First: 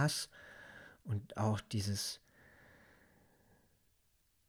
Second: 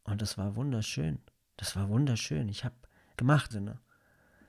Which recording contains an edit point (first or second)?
second